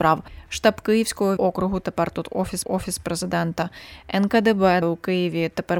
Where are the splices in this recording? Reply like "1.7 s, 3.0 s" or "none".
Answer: 1.4 s, 2.6 s, 4.8 s